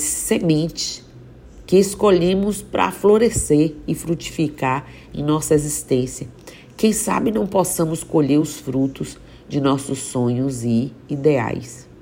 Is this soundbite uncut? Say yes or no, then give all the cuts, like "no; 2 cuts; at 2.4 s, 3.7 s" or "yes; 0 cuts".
yes; 0 cuts